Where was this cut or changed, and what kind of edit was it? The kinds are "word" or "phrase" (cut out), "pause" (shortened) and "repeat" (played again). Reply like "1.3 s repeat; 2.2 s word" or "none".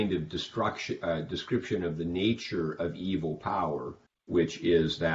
4.1 s pause